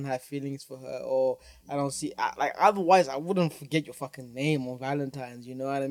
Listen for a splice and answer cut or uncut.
uncut